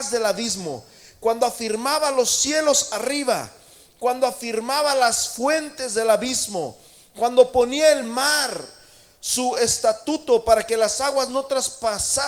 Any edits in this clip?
no; 0 cuts

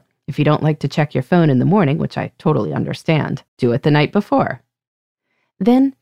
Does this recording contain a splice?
yes; 1 cut; at 3.5 s

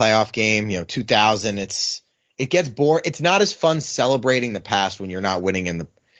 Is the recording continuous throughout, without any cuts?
yes; 0 cuts

